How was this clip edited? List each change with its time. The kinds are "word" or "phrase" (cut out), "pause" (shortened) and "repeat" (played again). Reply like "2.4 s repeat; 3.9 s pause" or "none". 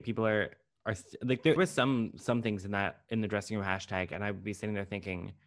1.6 s word

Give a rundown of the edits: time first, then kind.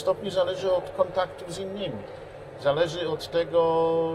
none

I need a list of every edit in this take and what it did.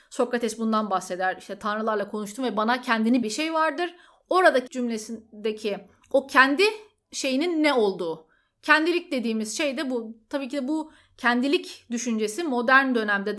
3.2 s phrase; 4.7 s phrase

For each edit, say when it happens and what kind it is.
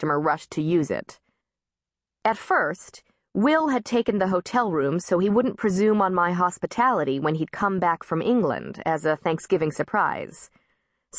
none

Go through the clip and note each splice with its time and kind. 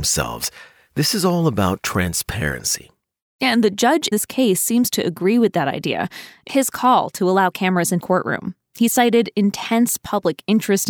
4.1 s word; 6.5 s word; 8.0 s word

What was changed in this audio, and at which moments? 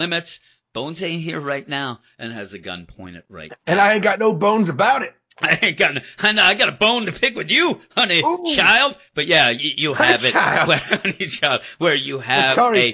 none

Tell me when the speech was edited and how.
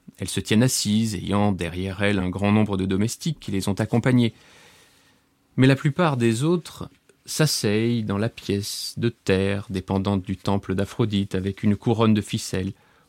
none

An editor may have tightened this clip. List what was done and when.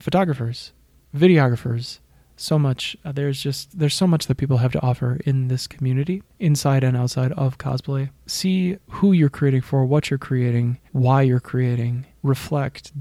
10.9 s pause

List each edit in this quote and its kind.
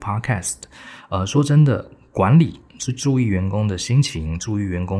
none

